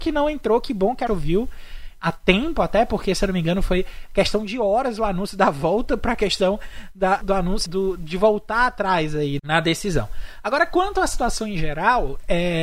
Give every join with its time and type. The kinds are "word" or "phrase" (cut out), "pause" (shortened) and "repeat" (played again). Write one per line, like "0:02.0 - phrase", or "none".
0:01.1 - word
0:07.2 - word
0:07.7 - word
0:09.4 - word